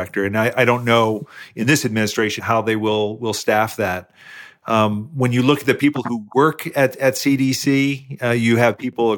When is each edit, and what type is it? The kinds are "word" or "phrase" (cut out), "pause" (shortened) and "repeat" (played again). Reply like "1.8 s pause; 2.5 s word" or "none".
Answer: 2.4 s word